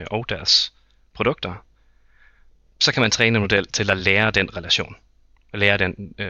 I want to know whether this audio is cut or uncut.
uncut